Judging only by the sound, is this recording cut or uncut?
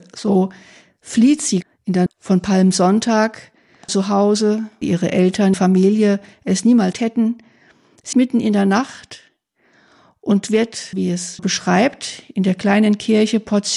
cut